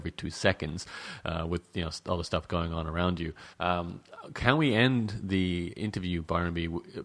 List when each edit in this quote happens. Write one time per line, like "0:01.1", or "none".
0:03.5